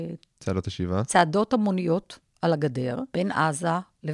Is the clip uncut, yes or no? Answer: yes